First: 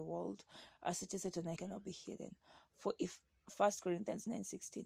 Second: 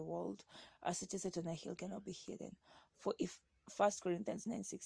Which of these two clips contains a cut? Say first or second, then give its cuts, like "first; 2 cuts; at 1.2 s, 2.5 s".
first; 1 cut; at 1.6 s